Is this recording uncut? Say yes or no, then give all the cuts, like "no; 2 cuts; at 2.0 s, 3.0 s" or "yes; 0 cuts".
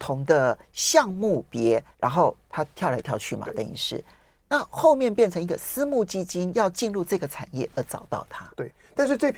no; 1 cut; at 1.9 s